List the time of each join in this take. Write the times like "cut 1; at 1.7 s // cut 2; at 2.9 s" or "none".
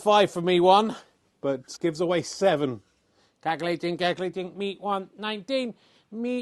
cut 1; at 1.8 s